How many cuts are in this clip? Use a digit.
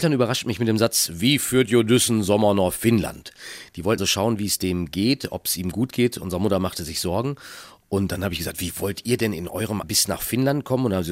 2